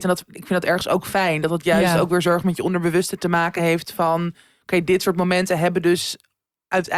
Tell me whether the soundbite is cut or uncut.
uncut